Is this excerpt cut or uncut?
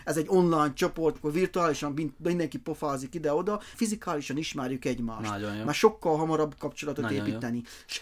cut